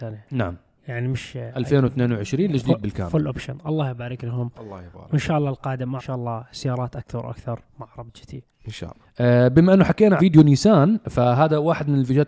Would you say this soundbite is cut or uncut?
cut